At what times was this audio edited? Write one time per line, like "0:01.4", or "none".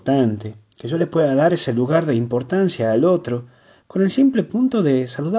none